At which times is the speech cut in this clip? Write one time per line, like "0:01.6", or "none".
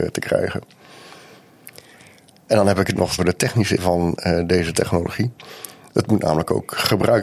0:03.2
0:03.8